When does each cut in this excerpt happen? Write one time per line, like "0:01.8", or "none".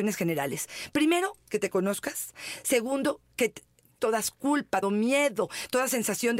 0:04.0
0:04.8